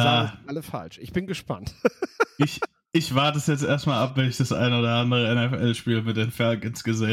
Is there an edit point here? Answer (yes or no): no